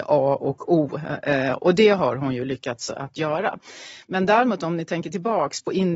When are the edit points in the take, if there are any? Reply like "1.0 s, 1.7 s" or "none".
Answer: none